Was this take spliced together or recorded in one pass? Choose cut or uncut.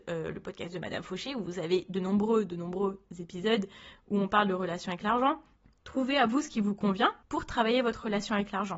cut